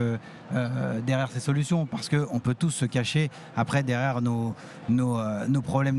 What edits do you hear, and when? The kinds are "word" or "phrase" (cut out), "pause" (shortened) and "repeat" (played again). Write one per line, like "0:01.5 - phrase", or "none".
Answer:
none